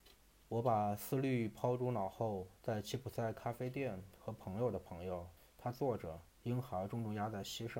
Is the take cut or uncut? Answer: cut